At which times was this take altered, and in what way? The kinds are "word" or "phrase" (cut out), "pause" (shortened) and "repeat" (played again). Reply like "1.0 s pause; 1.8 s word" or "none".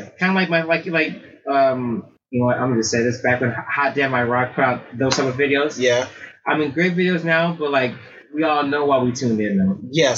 2.2 s pause